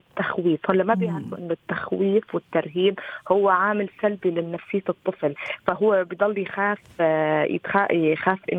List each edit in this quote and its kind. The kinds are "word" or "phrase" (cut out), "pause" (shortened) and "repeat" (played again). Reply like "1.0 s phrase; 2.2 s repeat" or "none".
none

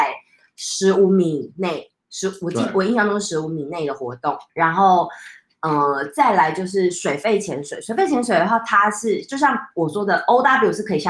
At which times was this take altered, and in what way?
4.5 s pause

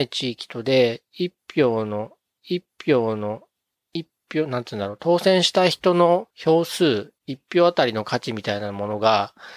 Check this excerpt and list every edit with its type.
2.4 s repeat; 6.3 s pause

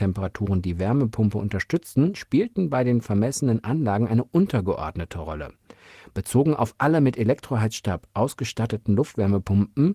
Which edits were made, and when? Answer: none

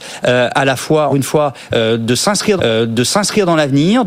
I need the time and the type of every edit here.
1.1 s word; 2.6 s repeat

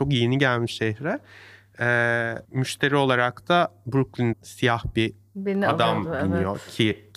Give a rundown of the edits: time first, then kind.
2.4 s pause; 4.3 s word

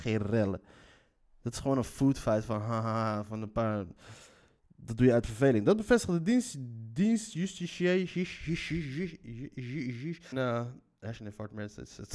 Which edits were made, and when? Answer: 10.3 s phrase

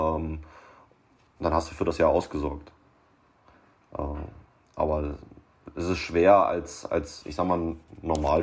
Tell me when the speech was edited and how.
none

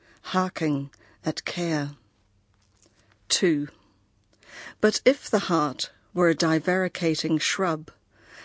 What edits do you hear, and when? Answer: none

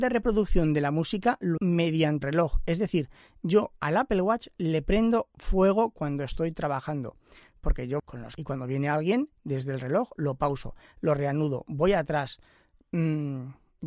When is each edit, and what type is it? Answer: 1.6 s word; 2.2 s word; 8.0 s word; 8.4 s word

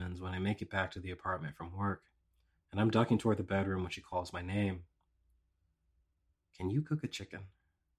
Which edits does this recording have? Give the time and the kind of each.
none

